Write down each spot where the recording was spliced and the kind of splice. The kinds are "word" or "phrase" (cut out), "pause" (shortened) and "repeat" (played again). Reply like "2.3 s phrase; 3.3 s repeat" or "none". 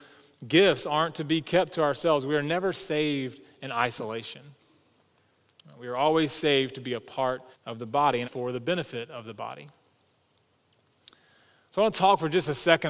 7.5 s pause; 8.2 s phrase